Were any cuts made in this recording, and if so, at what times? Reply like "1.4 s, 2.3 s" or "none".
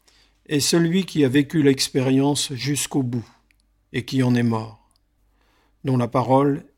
none